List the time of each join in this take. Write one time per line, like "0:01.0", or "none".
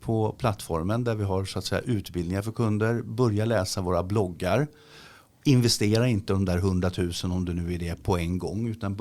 none